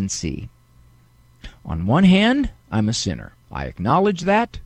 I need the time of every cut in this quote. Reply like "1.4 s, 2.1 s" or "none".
3.4 s